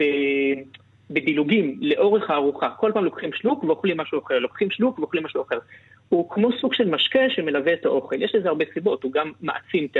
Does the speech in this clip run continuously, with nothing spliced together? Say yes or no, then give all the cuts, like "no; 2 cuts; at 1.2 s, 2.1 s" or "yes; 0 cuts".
yes; 0 cuts